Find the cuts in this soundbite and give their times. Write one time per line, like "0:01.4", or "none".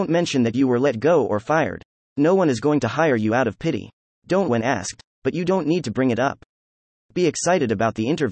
0:04.5